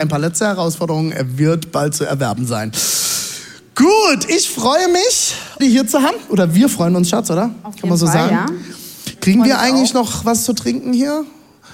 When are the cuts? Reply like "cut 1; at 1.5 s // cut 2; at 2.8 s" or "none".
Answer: cut 1; at 5.6 s